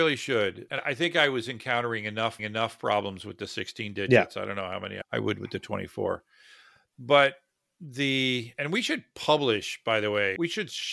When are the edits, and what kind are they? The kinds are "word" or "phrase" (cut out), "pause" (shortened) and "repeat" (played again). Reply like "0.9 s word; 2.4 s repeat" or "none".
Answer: 2.4 s repeat

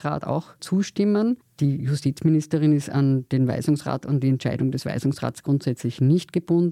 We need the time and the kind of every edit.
1.4 s pause

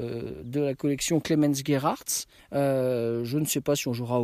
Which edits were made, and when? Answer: 2.4 s pause

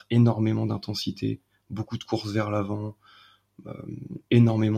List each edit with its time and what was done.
none

